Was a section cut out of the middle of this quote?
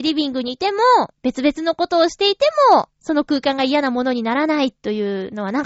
yes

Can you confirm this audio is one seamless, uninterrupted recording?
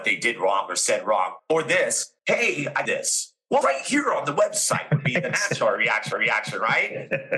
no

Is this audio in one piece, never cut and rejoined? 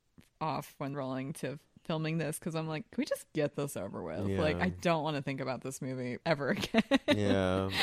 no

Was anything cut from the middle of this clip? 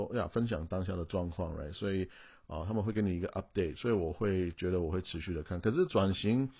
no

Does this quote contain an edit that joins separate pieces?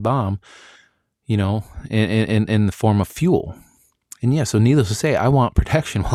no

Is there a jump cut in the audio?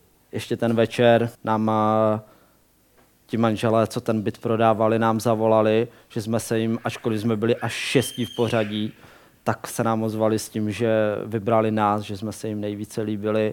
yes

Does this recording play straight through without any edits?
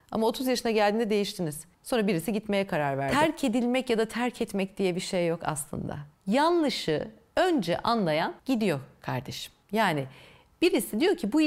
no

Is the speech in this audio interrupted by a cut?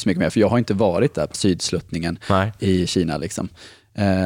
yes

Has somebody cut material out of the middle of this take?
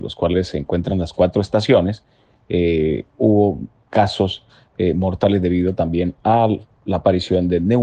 no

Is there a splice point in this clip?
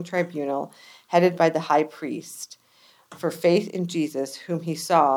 no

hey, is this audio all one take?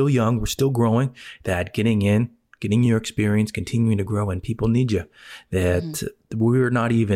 yes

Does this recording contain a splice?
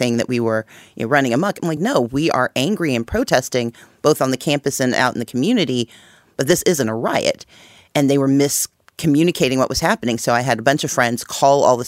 no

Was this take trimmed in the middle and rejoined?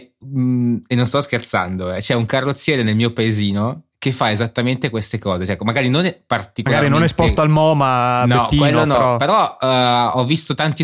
no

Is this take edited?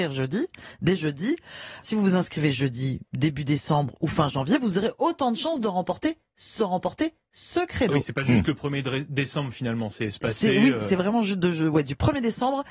yes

